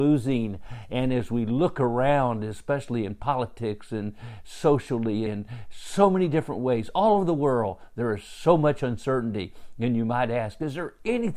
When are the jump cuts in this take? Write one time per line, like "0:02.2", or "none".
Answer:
0:05.3